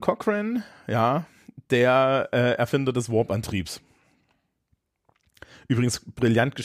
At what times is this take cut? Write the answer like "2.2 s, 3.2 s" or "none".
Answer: none